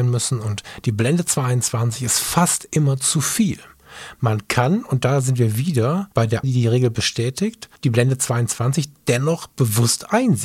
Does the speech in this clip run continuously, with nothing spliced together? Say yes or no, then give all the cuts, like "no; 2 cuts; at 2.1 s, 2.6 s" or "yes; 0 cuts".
no; 3 cuts; at 6.1 s, 6.4 s, 7.8 s